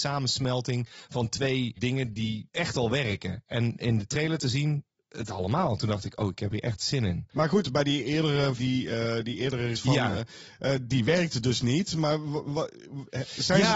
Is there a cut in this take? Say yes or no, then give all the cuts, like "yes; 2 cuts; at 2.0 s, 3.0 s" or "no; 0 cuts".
yes; 3 cuts; at 5.2 s, 8.6 s, 9.7 s